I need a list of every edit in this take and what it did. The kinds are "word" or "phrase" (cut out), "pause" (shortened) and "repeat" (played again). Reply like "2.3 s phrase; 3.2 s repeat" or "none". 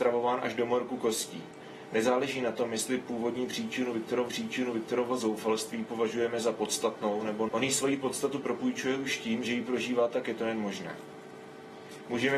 4.3 s repeat; 7.5 s word; 10.2 s phrase